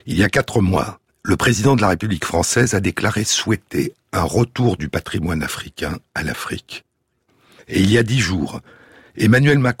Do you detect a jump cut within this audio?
no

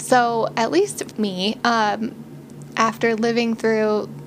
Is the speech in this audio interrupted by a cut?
yes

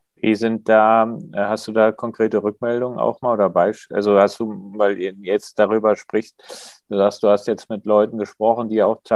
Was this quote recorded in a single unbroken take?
yes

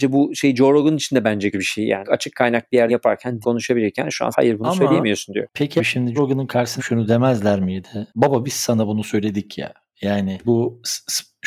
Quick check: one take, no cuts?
no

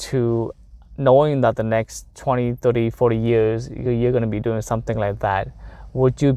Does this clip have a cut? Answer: no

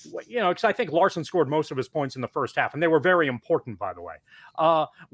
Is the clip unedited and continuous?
yes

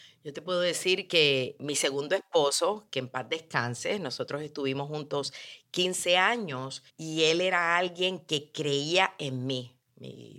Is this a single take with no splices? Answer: no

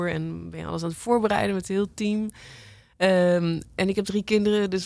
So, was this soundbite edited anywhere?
no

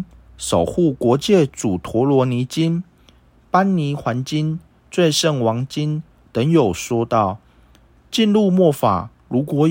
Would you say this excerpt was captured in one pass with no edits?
yes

